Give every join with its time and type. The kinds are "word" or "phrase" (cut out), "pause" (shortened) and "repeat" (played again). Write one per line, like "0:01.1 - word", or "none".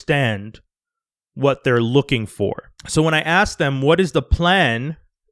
0:02.8 - pause